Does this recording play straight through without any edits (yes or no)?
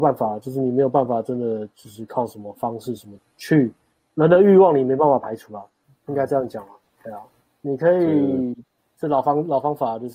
yes